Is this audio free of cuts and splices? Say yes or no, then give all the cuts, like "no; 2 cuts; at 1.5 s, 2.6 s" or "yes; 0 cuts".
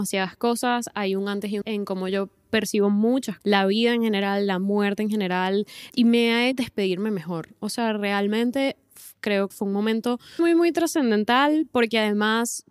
no; 6 cuts; at 1.6 s, 3.4 s, 5.9 s, 6.5 s, 9.5 s, 10.4 s